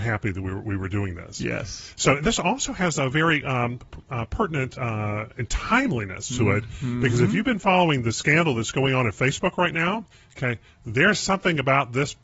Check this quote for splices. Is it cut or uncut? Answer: cut